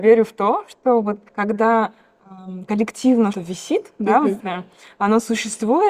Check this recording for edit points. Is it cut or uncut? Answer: cut